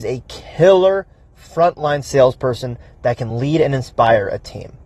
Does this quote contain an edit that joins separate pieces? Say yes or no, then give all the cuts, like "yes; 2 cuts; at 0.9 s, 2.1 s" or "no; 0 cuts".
no; 0 cuts